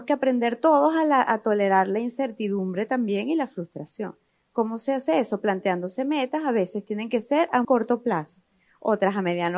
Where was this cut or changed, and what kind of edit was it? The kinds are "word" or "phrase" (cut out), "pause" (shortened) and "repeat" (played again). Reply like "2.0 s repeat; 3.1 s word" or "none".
7.6 s word

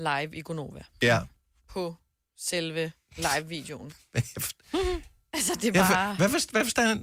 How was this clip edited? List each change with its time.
none

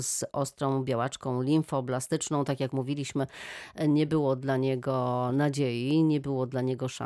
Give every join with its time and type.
none

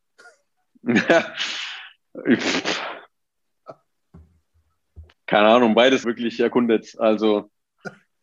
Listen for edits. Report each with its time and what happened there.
5.1 s word; 6.0 s phrase

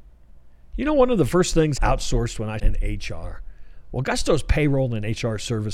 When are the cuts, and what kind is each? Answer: 1.8 s word; 2.6 s phrase

